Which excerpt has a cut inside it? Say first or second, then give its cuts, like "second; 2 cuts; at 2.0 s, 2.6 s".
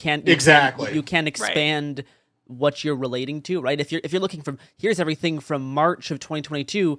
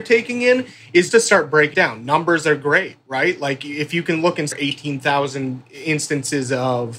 second; 3 cuts; at 1.1 s, 1.7 s, 4.5 s